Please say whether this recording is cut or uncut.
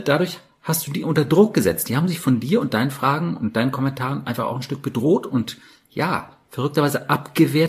uncut